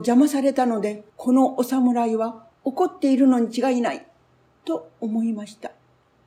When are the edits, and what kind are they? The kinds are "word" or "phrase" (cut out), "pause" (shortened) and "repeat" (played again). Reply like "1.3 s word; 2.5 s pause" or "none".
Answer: 1.1 s pause